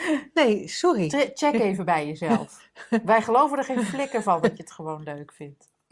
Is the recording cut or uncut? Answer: uncut